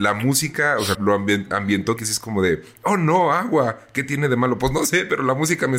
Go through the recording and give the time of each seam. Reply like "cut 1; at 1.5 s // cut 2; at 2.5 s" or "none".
cut 1; at 0.9 s // cut 2; at 2.0 s